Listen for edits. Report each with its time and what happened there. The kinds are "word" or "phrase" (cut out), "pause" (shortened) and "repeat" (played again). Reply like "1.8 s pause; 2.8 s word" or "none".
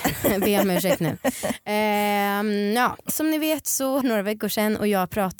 3.0 s pause; 4.0 s word